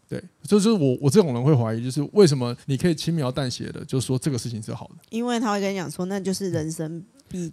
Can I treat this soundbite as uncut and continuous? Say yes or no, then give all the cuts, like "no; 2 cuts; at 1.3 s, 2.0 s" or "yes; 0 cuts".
no; 1 cut; at 2.6 s